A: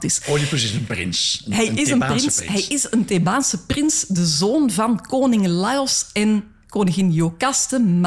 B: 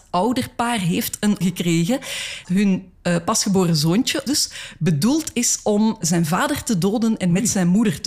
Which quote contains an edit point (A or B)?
B